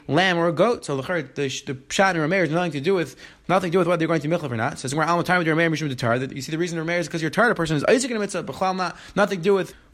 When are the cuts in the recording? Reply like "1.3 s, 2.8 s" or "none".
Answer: none